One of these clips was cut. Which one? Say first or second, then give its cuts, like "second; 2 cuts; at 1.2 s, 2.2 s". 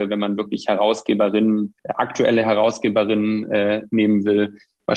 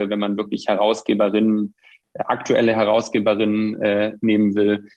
first; 1 cut; at 1.8 s